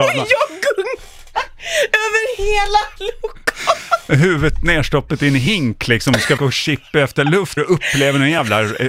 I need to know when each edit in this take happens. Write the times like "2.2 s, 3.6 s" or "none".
6.4 s, 7.6 s